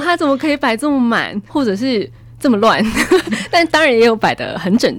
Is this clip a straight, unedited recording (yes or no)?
no